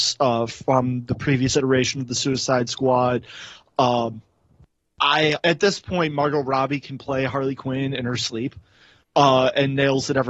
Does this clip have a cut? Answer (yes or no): yes